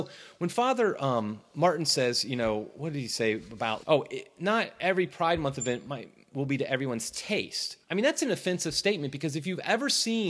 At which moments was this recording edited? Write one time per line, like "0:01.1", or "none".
0:03.8
0:07.8